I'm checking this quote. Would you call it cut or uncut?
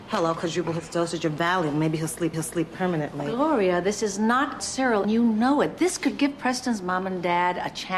cut